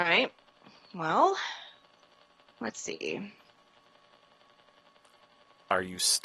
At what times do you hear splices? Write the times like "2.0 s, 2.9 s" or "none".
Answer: none